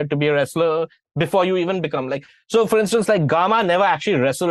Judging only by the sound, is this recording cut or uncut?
uncut